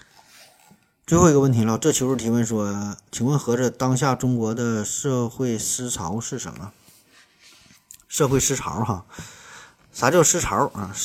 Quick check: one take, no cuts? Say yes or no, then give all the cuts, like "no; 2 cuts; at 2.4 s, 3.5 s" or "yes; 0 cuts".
yes; 0 cuts